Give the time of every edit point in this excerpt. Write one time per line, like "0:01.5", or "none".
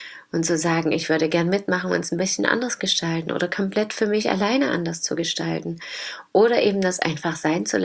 none